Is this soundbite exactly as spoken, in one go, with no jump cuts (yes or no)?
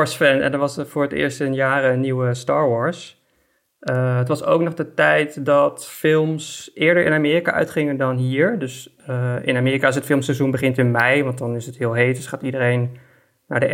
yes